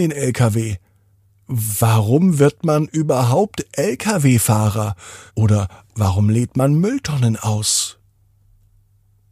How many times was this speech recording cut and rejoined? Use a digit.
1